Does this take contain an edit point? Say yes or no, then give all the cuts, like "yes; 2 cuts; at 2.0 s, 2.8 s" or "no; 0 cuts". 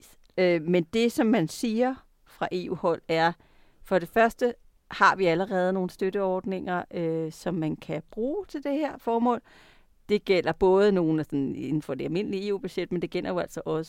no; 0 cuts